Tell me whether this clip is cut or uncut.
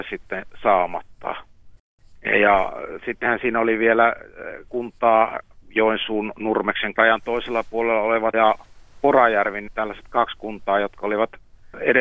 cut